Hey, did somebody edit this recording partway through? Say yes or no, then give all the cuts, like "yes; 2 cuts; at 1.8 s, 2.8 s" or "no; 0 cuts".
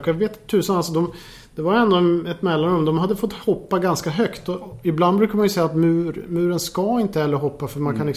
no; 0 cuts